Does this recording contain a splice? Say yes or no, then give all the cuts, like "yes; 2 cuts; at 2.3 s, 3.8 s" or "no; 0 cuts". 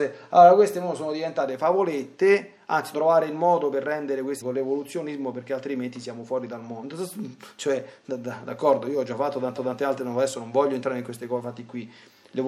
yes; 3 cuts; at 2.9 s, 4.4 s, 9.6 s